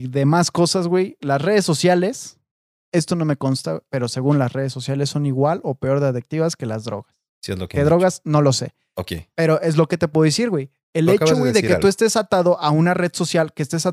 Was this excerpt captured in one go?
yes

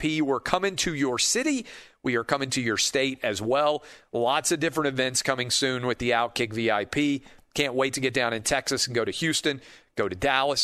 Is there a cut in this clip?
no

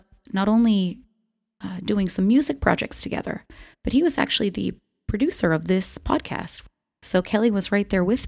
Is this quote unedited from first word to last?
yes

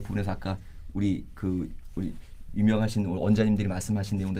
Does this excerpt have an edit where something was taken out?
no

